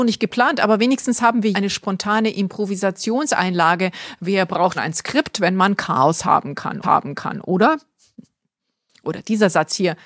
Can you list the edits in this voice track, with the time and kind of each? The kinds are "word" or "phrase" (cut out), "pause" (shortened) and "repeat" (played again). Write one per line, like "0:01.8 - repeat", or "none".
0:01.5 - word
0:04.7 - word
0:06.8 - repeat